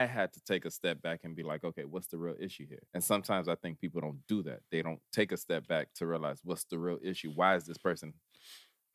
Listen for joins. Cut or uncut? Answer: cut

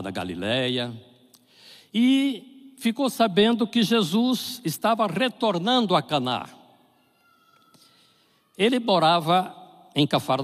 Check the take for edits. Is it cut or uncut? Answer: uncut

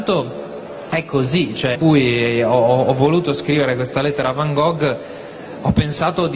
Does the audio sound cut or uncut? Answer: cut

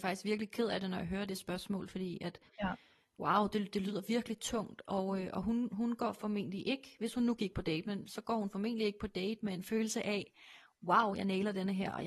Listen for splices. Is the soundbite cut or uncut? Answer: uncut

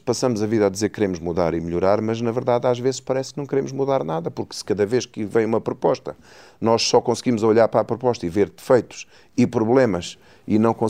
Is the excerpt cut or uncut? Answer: uncut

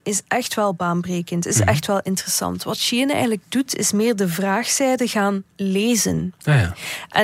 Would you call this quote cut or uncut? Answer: uncut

